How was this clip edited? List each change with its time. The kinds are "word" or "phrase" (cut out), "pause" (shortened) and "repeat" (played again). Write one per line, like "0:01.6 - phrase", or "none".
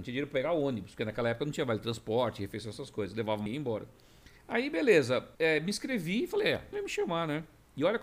0:03.5 - word
0:04.4 - pause
0:05.3 - pause
0:06.7 - word